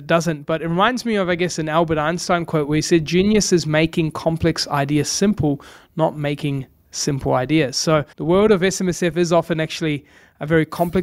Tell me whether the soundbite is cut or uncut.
cut